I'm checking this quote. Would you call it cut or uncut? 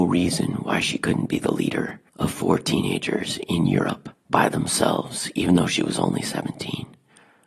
cut